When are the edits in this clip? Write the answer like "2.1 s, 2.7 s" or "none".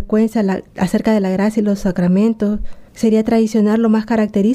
2.9 s